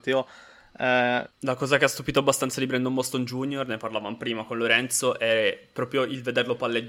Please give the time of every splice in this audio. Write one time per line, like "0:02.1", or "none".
0:01.3